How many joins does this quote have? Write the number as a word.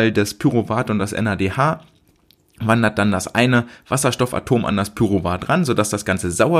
zero